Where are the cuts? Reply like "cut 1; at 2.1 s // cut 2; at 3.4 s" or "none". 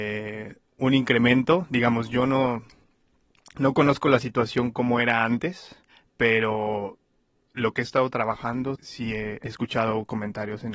cut 1; at 8.8 s // cut 2; at 9.4 s